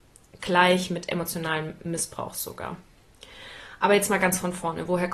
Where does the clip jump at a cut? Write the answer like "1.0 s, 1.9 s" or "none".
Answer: none

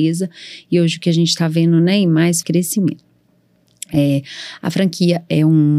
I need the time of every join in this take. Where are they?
2.4 s

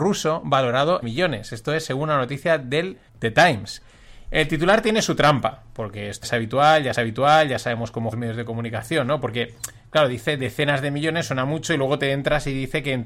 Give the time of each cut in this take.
1.0 s, 3.1 s, 6.2 s, 6.9 s, 8.1 s

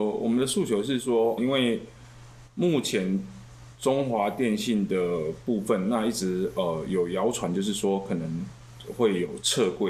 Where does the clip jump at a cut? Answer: 1.4 s

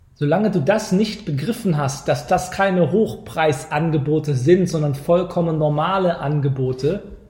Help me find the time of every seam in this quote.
none

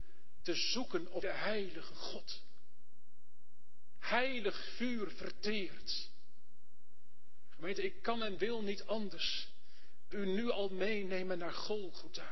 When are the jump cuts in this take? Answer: 1.2 s, 10.1 s

